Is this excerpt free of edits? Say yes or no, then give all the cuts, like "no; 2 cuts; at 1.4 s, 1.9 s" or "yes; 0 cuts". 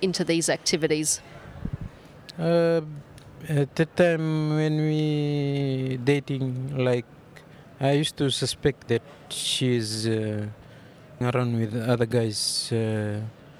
no; 2 cuts; at 8.9 s, 11.2 s